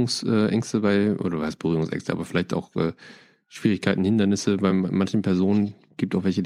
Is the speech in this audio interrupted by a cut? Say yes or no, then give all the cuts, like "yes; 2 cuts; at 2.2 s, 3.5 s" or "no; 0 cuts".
no; 0 cuts